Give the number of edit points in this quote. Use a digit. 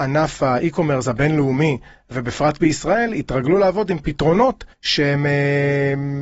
1